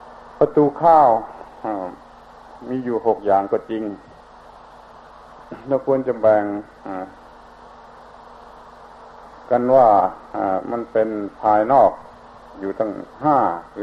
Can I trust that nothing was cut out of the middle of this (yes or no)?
yes